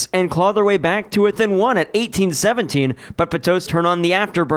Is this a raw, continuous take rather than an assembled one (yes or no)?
no